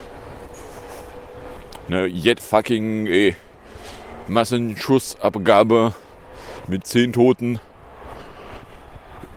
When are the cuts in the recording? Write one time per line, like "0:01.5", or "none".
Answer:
0:02.4
0:06.8